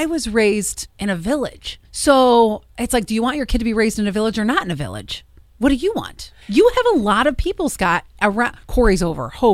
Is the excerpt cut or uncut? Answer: cut